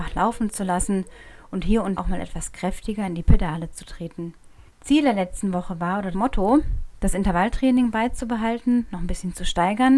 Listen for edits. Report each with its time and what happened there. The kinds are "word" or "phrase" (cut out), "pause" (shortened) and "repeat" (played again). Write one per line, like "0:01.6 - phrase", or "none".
0:02.0 - word
0:04.7 - pause
0:06.1 - word